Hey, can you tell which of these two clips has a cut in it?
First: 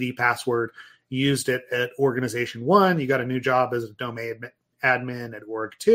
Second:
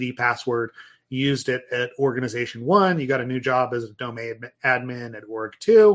second; 1 cut; at 4.5 s

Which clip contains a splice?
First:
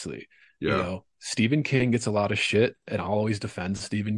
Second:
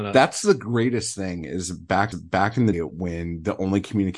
second; 2 cuts; at 2.1 s, 2.7 s

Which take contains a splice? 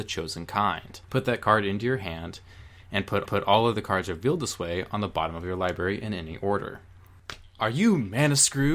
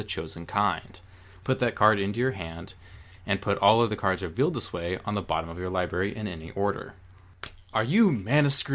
first; 2 cuts; at 1.0 s, 3.3 s

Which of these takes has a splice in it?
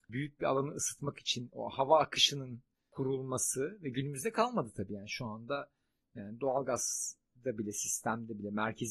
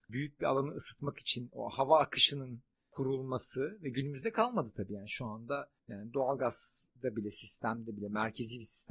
second; 2 cuts; at 5.8 s, 7.0 s

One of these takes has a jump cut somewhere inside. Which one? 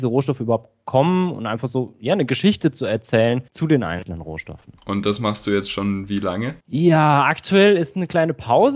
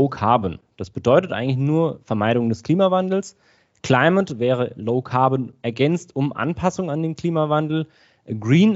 first; 3 cuts; at 3.5 s, 4.8 s, 6.6 s

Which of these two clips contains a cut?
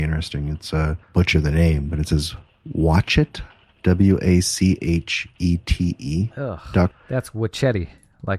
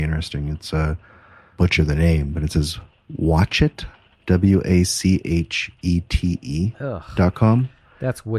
first; 2 cuts; at 1.0 s, 6.9 s

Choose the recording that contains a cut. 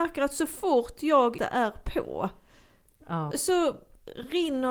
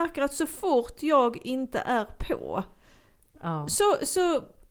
first; 2 cuts; at 1.4 s, 3.3 s

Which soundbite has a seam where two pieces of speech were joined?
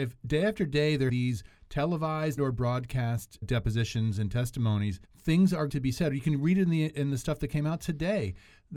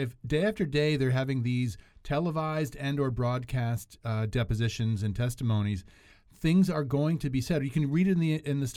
first; 5 cuts; at 1.1 s, 2.4 s, 3.4 s, 5.0 s, 5.7 s

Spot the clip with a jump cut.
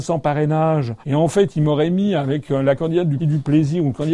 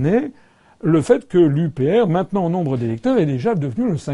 first; 2 cuts; at 1.0 s, 3.2 s

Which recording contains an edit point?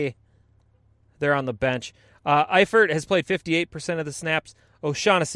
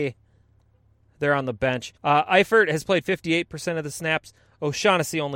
second; 1 cut; at 2.0 s

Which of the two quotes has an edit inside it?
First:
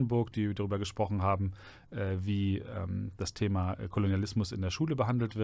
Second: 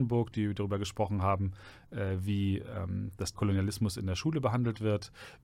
second; 1 cut; at 3.3 s

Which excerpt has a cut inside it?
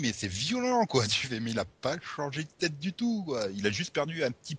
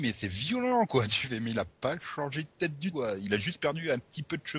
second; 1 cut; at 2.9 s

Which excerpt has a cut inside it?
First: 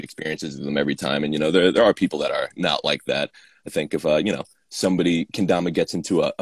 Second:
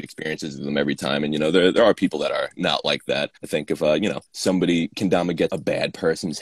second; 3 cuts; at 3.4 s, 4.3 s, 5.5 s

